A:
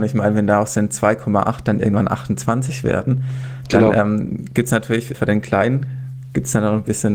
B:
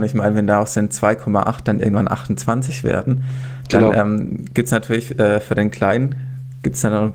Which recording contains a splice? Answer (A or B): A